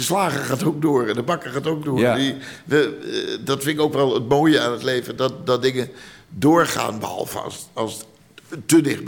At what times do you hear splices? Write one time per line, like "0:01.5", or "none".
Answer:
none